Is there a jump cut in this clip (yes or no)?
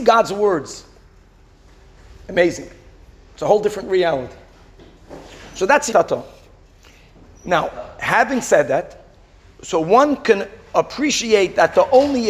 yes